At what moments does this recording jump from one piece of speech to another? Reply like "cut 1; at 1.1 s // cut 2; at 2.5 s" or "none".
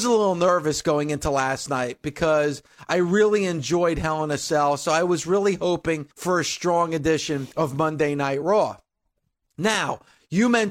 cut 1; at 6.1 s // cut 2; at 7.5 s